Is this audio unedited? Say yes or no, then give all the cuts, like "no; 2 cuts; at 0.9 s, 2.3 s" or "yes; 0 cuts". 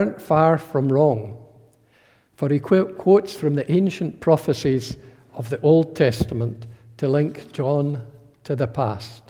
yes; 0 cuts